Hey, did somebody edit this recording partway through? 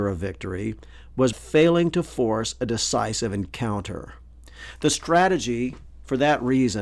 yes; 1 cut; at 1.3 s

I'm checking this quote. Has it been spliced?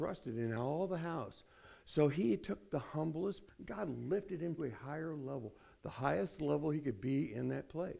yes; 2 cuts; at 3.5 s, 4.6 s

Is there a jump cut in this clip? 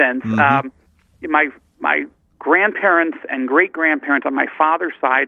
no; 0 cuts

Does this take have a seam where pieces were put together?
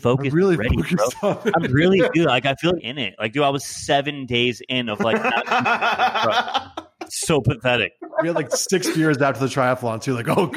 yes; 1 cut; at 2.8 s

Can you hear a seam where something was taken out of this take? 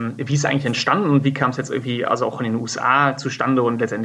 no; 0 cuts

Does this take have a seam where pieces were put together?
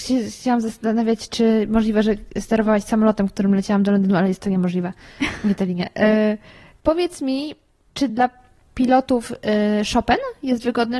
no; 0 cuts

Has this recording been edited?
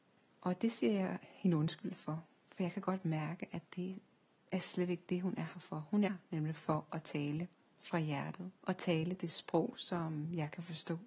yes; 2 cuts; at 6.1 s, 8.6 s

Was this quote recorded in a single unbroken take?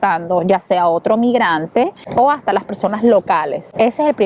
yes; 0 cuts

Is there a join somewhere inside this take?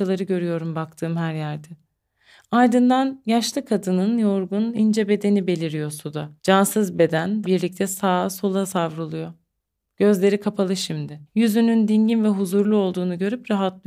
yes; 4 cuts; at 6.4 s, 7.4 s, 9.7 s, 11.3 s

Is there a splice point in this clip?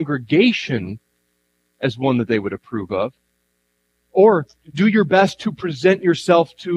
no; 0 cuts

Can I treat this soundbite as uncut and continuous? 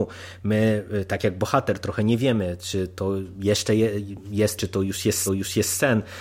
no; 2 cuts; at 4.6 s, 5.3 s

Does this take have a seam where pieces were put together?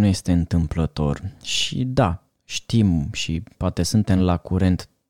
no; 0 cuts

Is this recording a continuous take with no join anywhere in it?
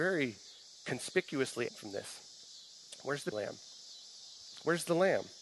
no; 2 cuts; at 1.7 s, 3.3 s

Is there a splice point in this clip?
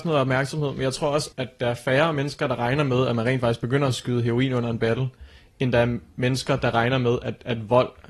yes; 1 cut; at 1.3 s

